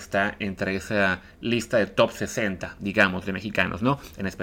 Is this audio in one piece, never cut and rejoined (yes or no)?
no